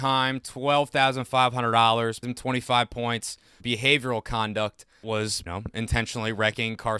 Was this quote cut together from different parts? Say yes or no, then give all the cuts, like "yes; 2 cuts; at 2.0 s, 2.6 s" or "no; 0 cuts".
yes; 4 cuts; at 2.2 s, 3.6 s, 5.0 s, 5.5 s